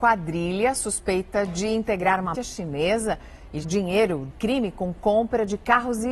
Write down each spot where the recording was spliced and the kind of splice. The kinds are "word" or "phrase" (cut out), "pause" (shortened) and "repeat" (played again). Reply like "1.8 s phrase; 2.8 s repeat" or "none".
2.3 s word; 3.6 s word; 4.3 s word